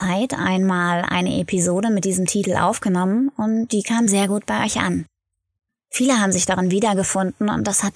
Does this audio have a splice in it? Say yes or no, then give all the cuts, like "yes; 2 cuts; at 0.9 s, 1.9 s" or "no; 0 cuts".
no; 0 cuts